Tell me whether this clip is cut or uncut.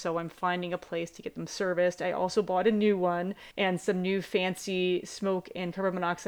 cut